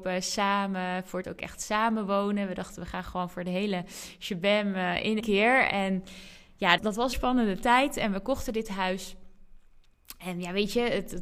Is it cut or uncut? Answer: cut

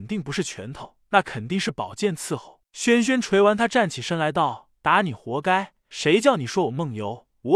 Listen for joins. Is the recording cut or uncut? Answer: uncut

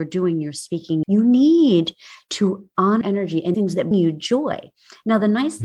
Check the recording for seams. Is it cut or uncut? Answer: cut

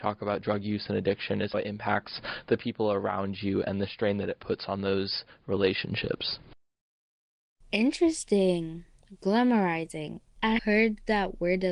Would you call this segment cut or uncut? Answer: cut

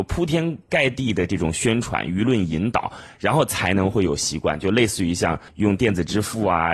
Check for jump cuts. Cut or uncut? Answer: cut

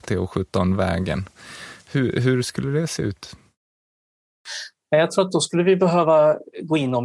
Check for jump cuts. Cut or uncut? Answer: uncut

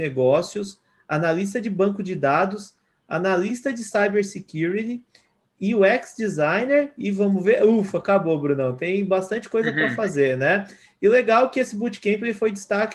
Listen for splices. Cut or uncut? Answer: uncut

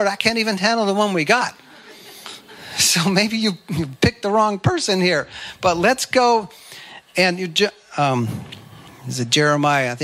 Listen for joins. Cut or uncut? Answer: uncut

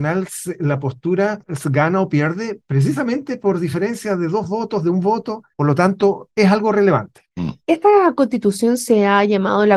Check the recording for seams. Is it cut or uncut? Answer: cut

